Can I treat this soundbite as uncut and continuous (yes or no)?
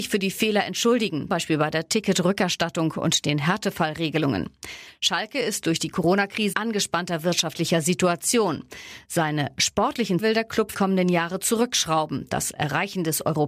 no